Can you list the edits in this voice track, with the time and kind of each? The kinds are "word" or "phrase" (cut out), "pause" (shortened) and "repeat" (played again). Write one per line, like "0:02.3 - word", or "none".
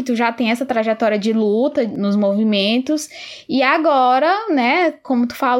none